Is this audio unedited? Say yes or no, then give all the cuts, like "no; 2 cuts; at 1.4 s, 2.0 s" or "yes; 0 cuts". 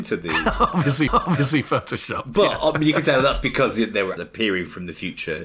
no; 2 cuts; at 1.1 s, 4.2 s